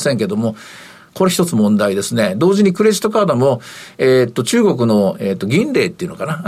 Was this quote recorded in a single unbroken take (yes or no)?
yes